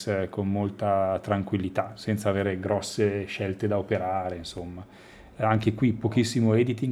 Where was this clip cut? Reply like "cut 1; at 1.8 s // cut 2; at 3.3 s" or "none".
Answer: none